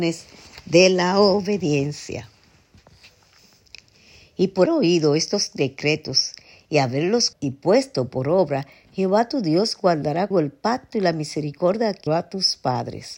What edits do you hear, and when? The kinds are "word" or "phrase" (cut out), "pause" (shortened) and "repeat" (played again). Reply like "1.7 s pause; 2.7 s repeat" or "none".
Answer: 4.7 s word; 7.3 s word; 10.3 s word; 12.1 s word